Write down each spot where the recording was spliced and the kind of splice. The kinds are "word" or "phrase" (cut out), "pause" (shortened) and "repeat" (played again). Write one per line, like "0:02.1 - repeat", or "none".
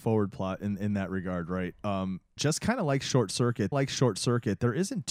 0:02.4 - word
0:03.7 - repeat